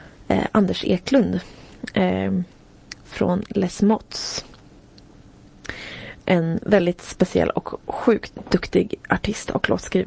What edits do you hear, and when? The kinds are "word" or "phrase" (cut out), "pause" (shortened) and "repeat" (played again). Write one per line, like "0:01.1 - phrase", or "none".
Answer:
none